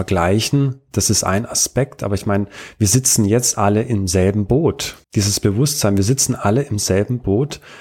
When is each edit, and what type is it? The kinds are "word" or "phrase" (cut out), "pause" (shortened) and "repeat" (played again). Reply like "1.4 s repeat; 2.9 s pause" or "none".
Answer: 5.0 s pause